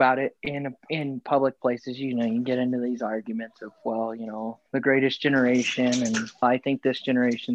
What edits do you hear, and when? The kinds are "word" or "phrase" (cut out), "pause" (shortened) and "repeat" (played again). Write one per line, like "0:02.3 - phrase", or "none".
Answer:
0:04.7 - pause
0:06.4 - word